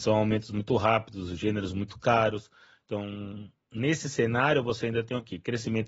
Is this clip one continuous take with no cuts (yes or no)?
yes